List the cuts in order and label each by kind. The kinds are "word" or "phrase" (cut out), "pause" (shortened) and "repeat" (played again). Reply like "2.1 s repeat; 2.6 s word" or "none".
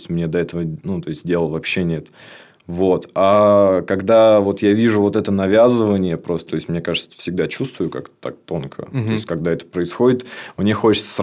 6.5 s phrase

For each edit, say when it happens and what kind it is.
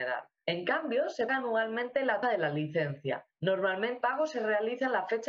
1.3 s word; 2.2 s word; 4.0 s word

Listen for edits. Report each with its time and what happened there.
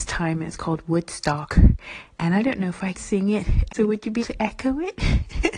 2.9 s word; 3.7 s word; 4.2 s word

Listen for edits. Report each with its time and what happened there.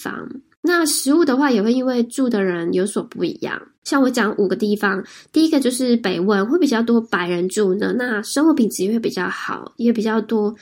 3.7 s pause

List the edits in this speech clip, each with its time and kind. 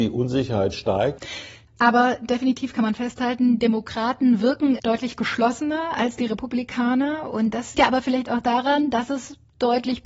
3.6 s word; 4.8 s word; 7.7 s word

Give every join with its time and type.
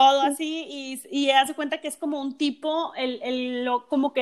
none

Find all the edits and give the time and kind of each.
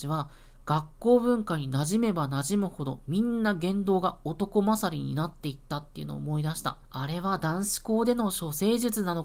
6.8 s pause

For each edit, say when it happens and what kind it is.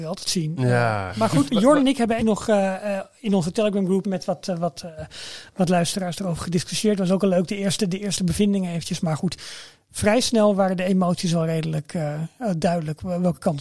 1.5 s word; 2.2 s word; 4.0 s word

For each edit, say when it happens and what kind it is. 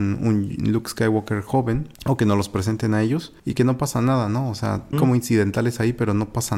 1.9 s pause; 3.4 s pause; 4.9 s word

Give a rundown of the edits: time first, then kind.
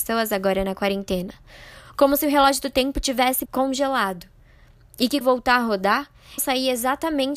3.4 s word; 5.2 s word; 6.4 s word

